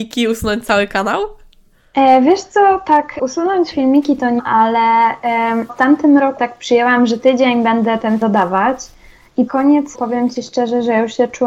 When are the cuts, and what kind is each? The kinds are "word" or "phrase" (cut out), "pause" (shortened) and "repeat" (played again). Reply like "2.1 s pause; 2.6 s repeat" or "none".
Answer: 3.2 s word; 3.7 s word; 4.4 s word; 5.7 s word; 6.4 s word; 7.2 s word; 8.2 s word; 9.5 s word; 9.9 s word